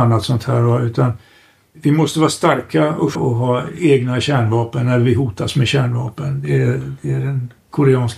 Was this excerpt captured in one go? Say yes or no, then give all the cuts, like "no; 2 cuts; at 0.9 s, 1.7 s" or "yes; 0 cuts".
no; 2 cuts; at 1.7 s, 3.1 s